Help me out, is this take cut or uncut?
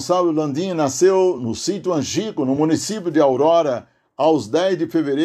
uncut